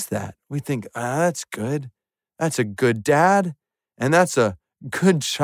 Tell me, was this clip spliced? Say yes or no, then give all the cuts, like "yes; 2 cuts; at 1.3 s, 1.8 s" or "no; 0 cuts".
no; 0 cuts